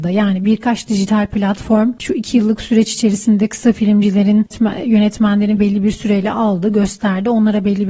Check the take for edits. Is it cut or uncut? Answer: cut